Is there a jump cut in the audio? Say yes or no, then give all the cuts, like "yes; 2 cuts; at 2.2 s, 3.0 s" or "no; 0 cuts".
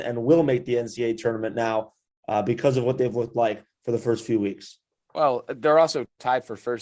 no; 0 cuts